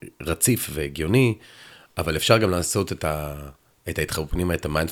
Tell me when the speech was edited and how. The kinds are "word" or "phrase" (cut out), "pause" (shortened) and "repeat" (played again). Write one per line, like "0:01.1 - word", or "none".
none

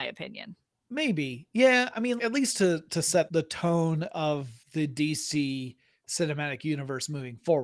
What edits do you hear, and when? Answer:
0:02.2 - word
0:03.3 - word
0:04.6 - pause

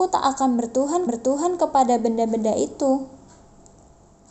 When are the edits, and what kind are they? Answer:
0:01.1 - repeat

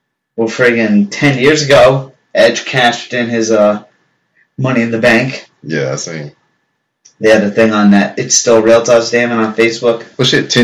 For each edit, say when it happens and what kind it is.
none

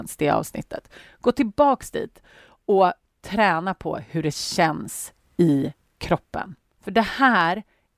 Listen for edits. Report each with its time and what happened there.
none

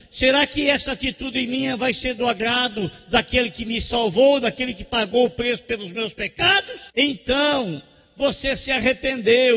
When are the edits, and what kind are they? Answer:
0:06.9 - pause

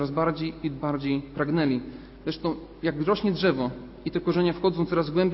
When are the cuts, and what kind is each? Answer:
none

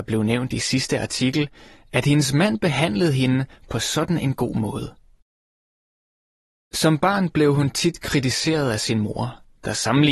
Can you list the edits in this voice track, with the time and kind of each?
none

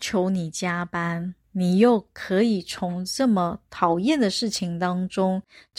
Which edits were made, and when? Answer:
0:01.4 - pause

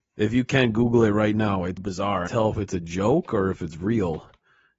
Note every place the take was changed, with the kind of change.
0:01.8 - word
0:02.3 - phrase

